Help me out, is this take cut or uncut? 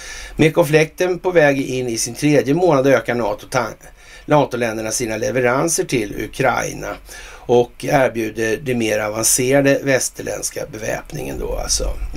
uncut